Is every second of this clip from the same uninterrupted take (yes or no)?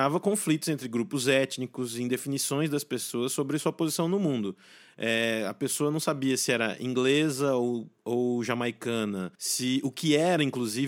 no